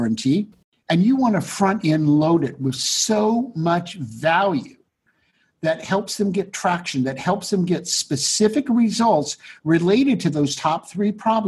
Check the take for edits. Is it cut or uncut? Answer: uncut